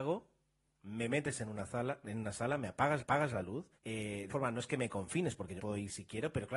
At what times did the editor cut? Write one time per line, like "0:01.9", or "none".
0:03.0
0:03.8
0:04.3
0:05.6